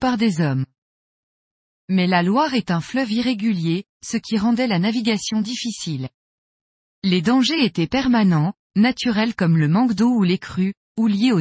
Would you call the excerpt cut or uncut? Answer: uncut